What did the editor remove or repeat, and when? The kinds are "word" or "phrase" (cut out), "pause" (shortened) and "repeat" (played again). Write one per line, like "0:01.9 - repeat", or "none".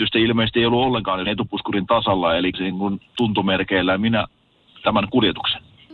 0:01.3 - word
0:02.5 - word
0:03.2 - word
0:04.8 - word